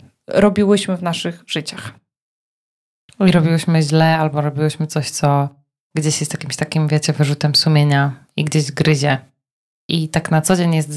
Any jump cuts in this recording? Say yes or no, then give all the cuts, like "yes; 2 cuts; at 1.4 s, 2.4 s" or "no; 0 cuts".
no; 0 cuts